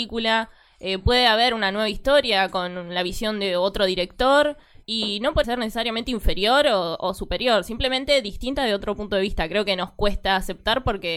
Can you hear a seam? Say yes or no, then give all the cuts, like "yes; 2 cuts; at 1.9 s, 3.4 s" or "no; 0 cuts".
yes; 2 cuts; at 4.8 s, 5.4 s